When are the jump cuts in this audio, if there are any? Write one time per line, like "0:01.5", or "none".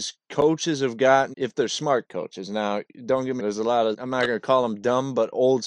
0:01.3
0:03.4
0:03.9

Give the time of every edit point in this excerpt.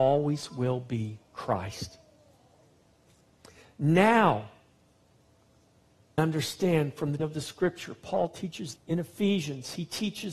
0:06.2
0:07.2
0:08.8

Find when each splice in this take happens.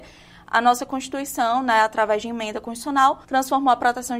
0:03.2

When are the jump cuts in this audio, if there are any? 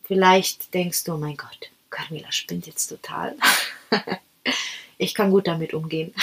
none

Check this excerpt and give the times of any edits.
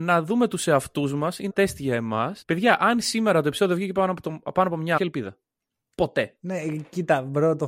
0:01.5
0:02.4
0:05.0

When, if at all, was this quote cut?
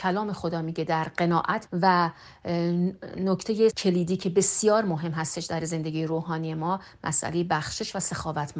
0:01.7
0:03.7

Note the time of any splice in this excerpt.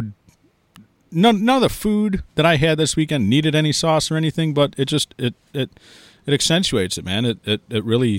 0:02.3

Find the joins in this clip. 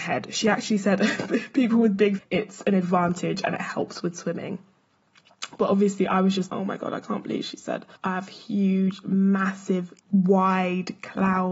0:02.2
0:06.5
0:08.0
0:10.0

